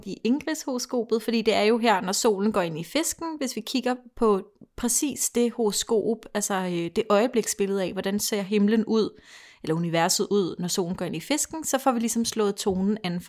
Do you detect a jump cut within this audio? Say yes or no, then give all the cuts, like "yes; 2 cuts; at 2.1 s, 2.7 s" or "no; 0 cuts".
no; 0 cuts